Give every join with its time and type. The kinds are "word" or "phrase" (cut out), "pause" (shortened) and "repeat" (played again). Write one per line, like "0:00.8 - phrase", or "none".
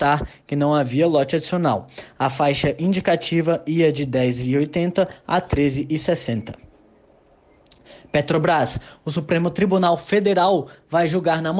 none